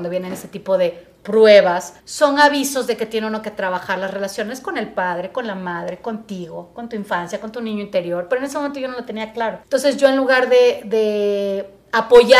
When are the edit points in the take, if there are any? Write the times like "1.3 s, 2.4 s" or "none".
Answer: 2.0 s, 9.6 s

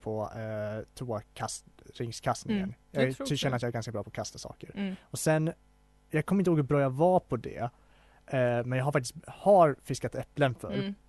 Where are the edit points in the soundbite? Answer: none

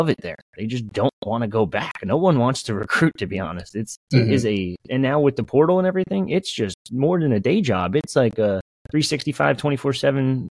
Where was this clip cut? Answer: 4.0 s, 4.8 s, 8.8 s

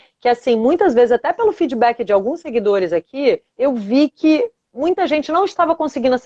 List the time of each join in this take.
3.5 s

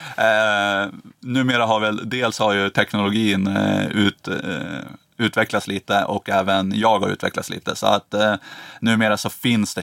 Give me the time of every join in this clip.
none

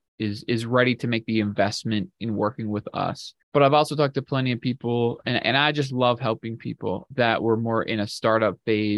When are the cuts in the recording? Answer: 3.4 s

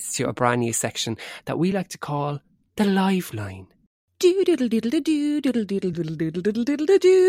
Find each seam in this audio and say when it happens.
none

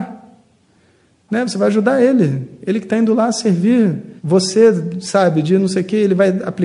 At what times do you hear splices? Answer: 4.2 s

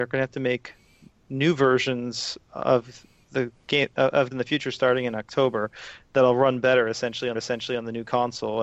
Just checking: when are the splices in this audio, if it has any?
4.3 s, 7.3 s

